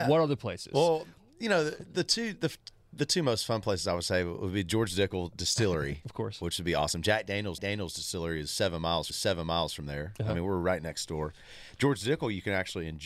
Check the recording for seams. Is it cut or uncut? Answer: cut